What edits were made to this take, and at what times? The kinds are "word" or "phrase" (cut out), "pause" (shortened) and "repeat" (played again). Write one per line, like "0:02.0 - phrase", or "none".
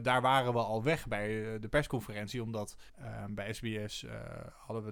0:02.9 - pause